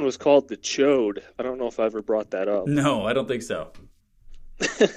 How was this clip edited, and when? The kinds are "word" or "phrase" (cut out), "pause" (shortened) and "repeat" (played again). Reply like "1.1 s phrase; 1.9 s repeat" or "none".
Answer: none